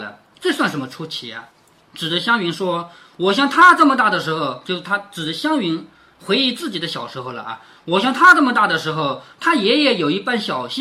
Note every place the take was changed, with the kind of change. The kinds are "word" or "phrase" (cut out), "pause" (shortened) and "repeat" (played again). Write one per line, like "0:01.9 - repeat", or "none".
0:01.5 - pause